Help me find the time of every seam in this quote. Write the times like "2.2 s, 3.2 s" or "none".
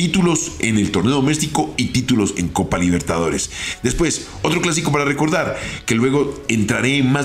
none